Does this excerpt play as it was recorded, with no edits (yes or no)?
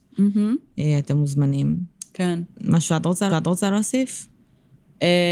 no